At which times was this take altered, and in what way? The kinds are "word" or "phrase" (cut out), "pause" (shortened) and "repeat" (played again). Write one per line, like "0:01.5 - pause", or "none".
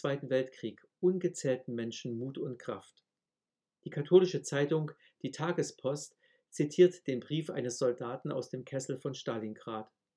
none